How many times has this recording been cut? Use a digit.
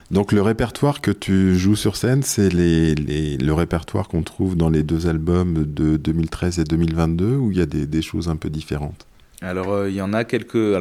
0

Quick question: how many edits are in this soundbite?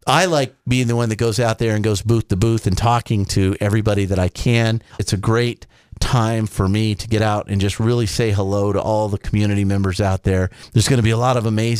0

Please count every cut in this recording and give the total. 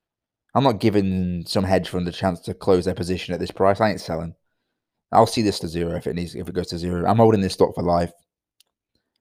1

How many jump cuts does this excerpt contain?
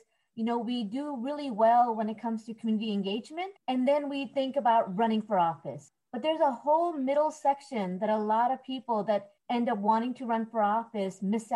2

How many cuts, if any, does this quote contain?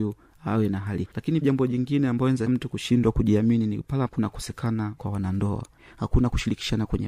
5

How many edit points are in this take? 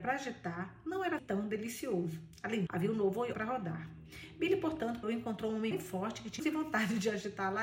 6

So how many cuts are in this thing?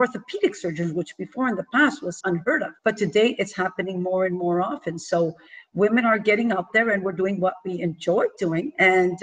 2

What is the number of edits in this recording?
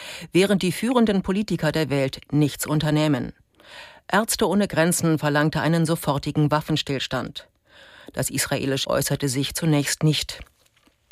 1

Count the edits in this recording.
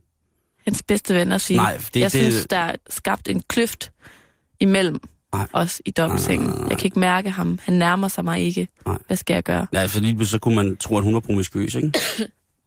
1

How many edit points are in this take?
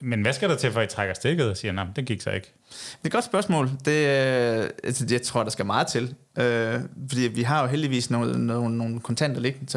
1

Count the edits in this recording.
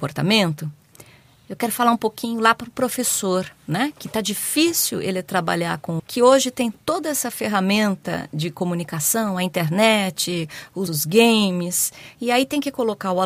2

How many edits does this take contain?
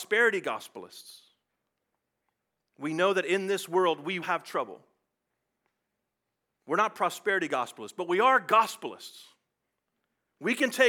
1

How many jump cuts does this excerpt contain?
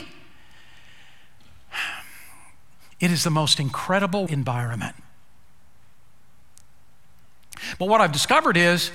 1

